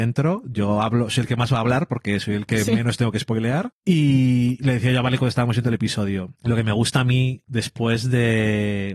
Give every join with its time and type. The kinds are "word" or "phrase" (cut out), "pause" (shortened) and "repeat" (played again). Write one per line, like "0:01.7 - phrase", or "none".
none